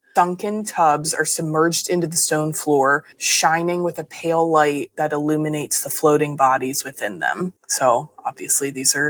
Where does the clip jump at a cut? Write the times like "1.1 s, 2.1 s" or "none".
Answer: 3.1 s, 7.6 s